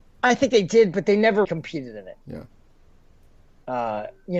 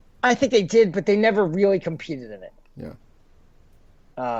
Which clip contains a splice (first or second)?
first